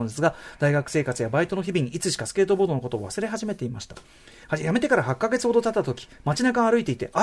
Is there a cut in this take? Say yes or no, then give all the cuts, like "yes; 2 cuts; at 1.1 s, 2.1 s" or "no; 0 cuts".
no; 0 cuts